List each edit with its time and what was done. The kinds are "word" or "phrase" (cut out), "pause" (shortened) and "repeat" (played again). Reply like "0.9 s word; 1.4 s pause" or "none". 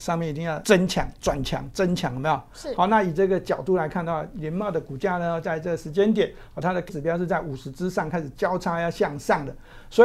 6.9 s word